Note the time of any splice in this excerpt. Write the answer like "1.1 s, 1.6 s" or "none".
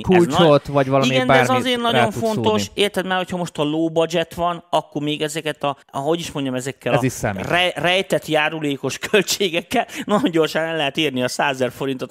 5.8 s